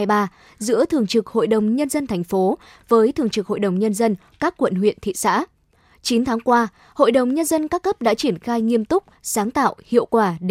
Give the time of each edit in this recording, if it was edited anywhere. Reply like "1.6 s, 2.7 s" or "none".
none

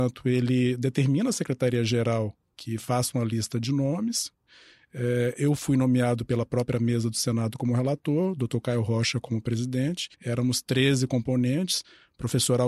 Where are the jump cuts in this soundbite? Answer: 10.1 s

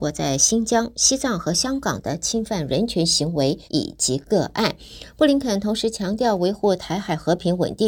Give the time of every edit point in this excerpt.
3.6 s

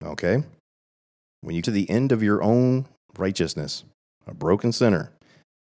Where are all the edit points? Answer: 1.6 s

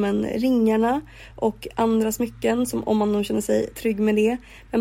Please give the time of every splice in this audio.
none

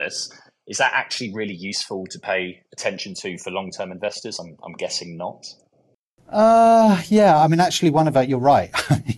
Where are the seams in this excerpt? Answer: none

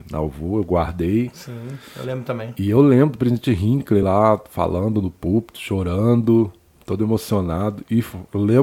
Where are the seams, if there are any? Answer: none

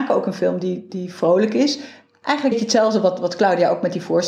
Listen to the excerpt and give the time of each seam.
2.5 s

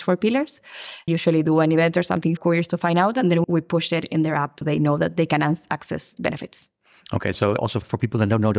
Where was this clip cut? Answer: 1.1 s, 2.4 s, 3.4 s, 4.6 s, 6.2 s, 7.3 s

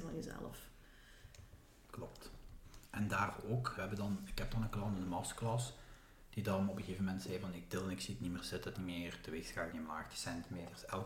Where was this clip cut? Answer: 3.8 s, 8.7 s, 9.7 s

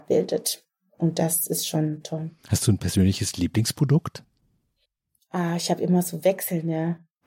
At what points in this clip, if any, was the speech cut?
2.4 s, 4.8 s

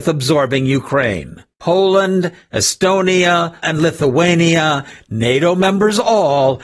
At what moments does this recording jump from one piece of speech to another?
1.5 s, 3.6 s

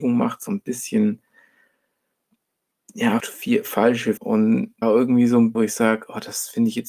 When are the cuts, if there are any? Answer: 3.2 s, 4.2 s, 4.8 s, 5.5 s

